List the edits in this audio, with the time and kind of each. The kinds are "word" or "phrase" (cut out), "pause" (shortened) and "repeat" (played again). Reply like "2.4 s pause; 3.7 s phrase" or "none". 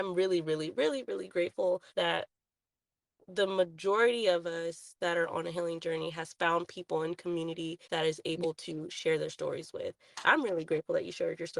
1.9 s pause; 7.8 s pause